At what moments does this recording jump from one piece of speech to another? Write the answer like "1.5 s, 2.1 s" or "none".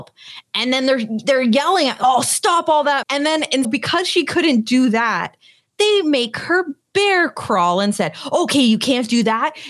3.0 s, 3.6 s